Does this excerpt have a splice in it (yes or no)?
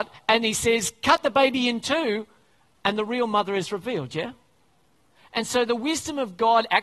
no